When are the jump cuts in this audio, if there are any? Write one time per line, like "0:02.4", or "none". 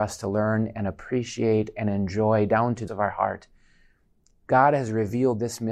0:02.9